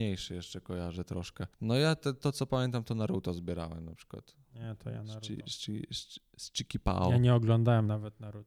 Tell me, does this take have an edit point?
yes; 1 cut; at 1.5 s

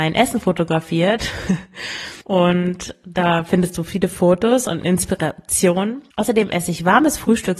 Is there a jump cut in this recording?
yes; 2 cuts; at 2.2 s, 6.1 s

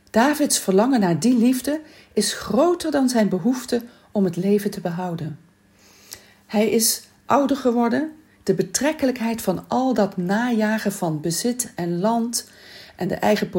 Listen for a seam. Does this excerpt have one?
no; 0 cuts

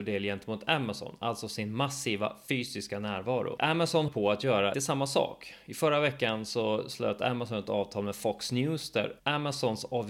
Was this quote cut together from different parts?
yes; 3 cuts; at 4.1 s, 4.7 s, 9.2 s

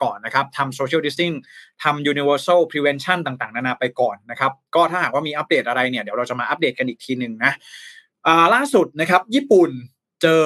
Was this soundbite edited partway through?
yes; 1 cut; at 1.2 s

